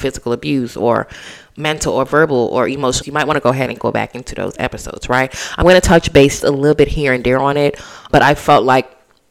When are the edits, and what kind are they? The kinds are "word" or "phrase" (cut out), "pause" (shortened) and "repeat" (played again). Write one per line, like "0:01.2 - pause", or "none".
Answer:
0:03.0 - word
0:03.8 - word
0:06.4 - word
0:08.1 - word

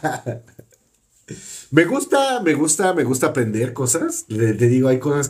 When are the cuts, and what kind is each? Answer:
none

